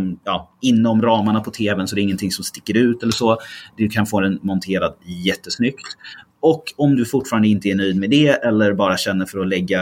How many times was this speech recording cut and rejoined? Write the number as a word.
zero